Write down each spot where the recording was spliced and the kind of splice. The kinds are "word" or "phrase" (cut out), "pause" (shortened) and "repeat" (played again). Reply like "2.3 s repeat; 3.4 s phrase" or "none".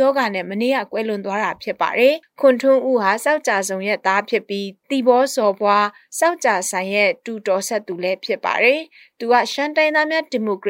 none